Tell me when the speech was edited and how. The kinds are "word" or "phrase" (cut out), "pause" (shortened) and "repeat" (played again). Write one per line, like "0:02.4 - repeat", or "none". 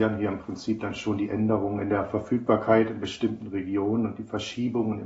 none